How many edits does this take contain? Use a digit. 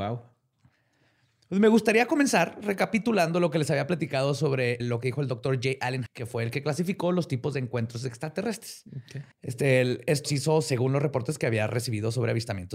4